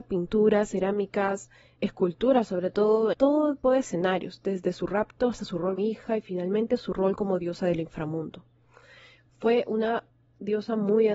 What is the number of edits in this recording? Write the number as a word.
four